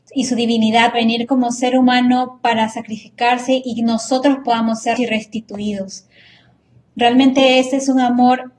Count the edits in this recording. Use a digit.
2